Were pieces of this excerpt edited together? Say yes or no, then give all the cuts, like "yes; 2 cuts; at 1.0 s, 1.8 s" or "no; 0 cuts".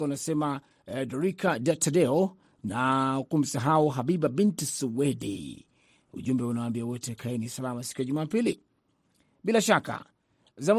no; 0 cuts